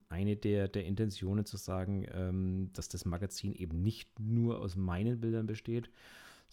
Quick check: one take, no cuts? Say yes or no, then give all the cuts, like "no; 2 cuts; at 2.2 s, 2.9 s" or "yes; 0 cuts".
yes; 0 cuts